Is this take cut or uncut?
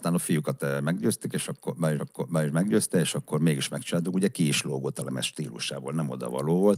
cut